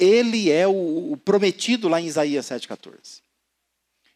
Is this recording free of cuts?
yes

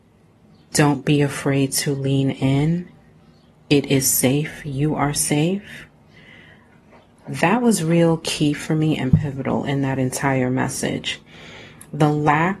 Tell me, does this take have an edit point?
no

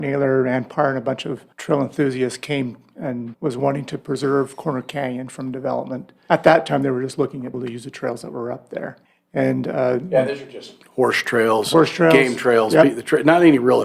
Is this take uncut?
no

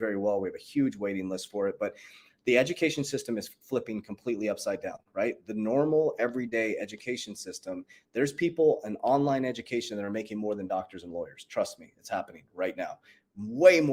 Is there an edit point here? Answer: no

